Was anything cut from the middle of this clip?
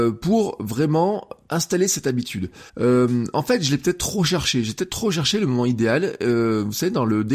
yes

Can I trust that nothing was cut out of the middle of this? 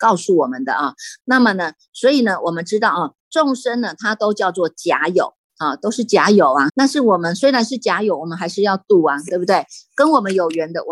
no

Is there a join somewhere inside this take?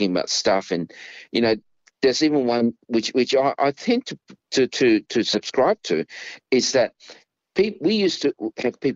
no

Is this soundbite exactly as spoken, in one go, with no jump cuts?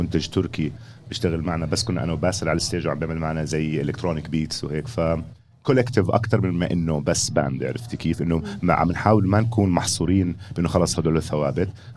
yes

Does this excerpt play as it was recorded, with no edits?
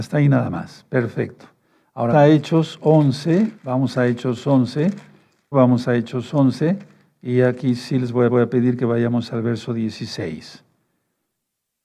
no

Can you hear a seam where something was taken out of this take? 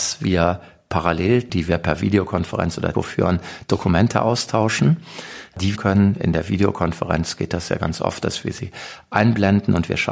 yes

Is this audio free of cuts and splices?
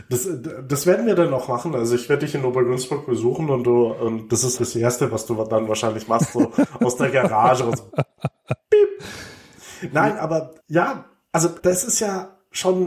no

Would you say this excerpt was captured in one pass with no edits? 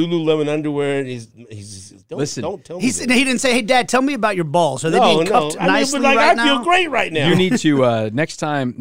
no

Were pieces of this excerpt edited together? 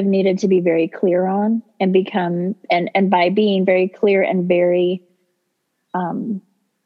no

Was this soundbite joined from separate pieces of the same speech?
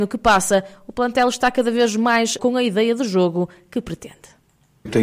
yes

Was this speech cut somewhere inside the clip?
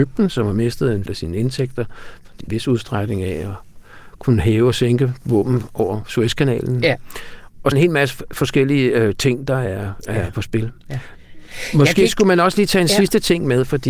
yes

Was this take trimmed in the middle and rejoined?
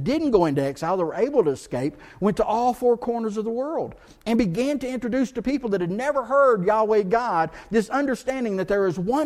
no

